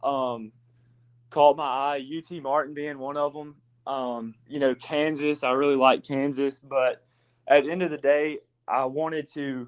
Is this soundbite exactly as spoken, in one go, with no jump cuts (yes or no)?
yes